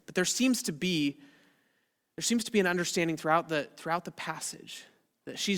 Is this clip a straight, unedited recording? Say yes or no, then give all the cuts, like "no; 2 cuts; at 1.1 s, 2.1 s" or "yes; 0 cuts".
yes; 0 cuts